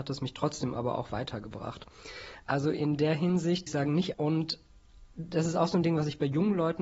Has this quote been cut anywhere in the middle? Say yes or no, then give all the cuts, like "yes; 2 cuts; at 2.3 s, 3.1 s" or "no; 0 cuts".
yes; 2 cuts; at 3.7 s, 4.1 s